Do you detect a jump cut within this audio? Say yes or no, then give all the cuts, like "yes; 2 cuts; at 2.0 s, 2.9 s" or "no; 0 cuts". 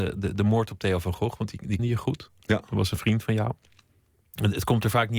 yes; 1 cut; at 1.8 s